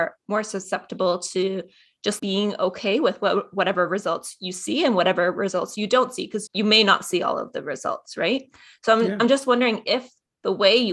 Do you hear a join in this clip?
yes; 2 cuts; at 2.2 s, 6.5 s

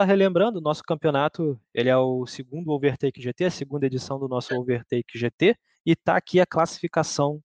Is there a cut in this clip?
yes; 1 cut; at 5.7 s

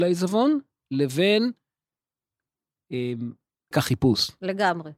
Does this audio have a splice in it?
yes; 1 cut; at 3.7 s

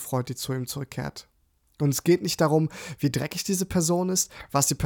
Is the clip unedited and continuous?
yes; 0 cuts

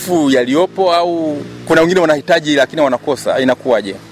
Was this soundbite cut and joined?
no; 0 cuts

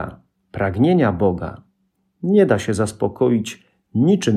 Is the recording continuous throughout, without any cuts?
yes; 0 cuts

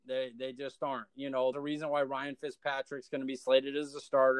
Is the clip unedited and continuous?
no; 1 cut; at 1.5 s

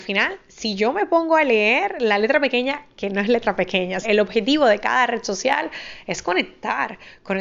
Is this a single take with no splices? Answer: no; 1 cut; at 4.0 s

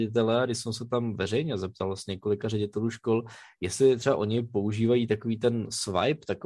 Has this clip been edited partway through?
no; 0 cuts

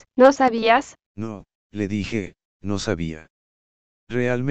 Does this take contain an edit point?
yes; 1 cut; at 1.0 s

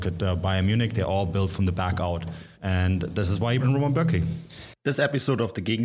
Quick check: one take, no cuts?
no; 2 cuts; at 2.5 s, 3.6 s

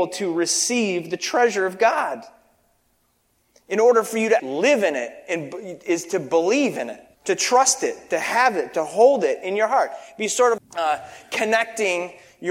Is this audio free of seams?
no; 3 cuts; at 4.4 s, 7.1 s, 10.6 s

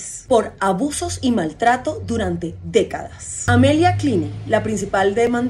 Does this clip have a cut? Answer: no; 0 cuts

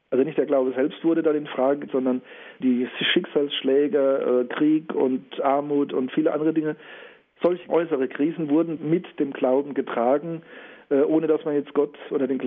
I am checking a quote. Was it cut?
yes; 4 cuts; at 1.9 s, 2.6 s, 7.7 s, 8.8 s

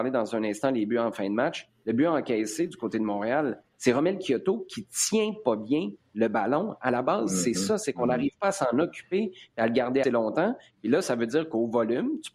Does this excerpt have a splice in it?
yes; 1 cut; at 10.0 s

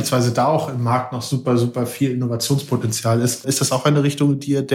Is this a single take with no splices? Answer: yes; 0 cuts

